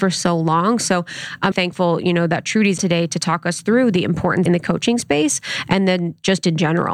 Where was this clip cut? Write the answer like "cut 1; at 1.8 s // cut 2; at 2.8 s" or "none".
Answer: cut 1; at 1.5 s // cut 2; at 2.8 s // cut 3; at 4.5 s